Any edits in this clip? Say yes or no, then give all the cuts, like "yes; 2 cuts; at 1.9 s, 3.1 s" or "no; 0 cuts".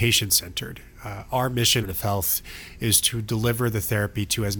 yes; 1 cut; at 1.8 s